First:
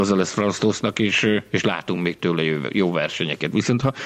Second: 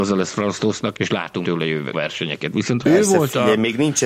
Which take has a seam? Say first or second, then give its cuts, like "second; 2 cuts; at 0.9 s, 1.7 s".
second; 4 cuts; at 0.9 s, 1.4 s, 1.9 s, 2.8 s